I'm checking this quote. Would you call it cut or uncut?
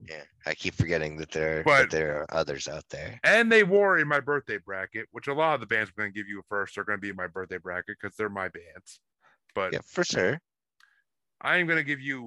uncut